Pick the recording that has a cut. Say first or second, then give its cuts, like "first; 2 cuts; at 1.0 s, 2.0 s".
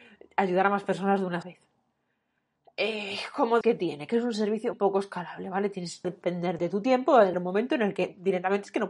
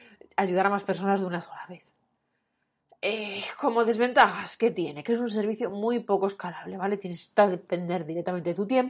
first; 6 cuts; at 1.4 s, 3.6 s, 4.7 s, 6.0 s, 6.6 s, 7.3 s